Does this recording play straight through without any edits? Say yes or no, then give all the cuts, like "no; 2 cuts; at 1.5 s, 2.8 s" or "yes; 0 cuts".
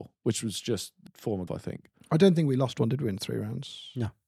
no; 2 cuts; at 1.1 s, 1.5 s